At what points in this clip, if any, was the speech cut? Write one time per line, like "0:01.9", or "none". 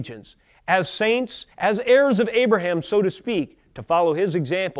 0:01.5